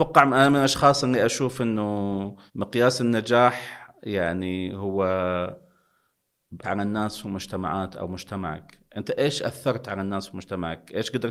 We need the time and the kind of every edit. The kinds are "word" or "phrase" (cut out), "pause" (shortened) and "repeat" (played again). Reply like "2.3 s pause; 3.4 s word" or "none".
2.5 s pause; 6.6 s word